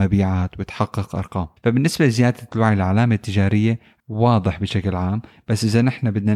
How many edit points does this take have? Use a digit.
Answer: 2